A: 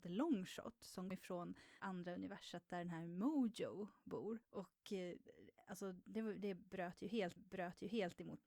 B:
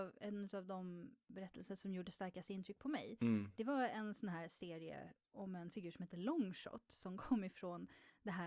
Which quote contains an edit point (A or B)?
A